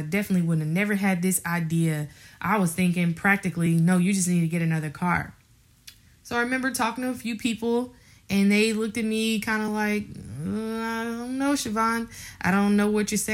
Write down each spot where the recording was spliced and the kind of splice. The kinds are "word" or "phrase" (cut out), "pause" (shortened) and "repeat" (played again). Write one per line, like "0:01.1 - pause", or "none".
none